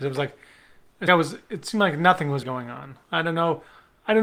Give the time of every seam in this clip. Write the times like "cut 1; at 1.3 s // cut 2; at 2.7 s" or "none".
cut 1; at 1.1 s // cut 2; at 2.4 s // cut 3; at 3.0 s